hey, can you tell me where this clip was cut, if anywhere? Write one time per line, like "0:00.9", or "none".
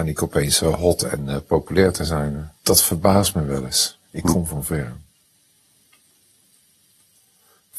0:02.6

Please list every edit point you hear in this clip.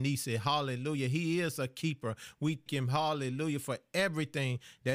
0:02.7

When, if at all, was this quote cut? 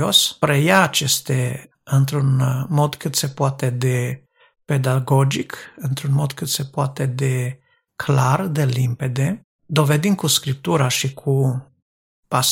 0:01.7

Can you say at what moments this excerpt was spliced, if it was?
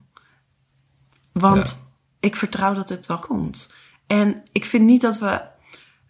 0:03.2

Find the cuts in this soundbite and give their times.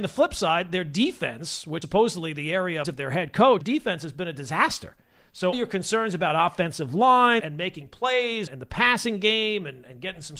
0:01.8
0:02.8
0:03.6
0:05.5
0:07.4
0:08.5

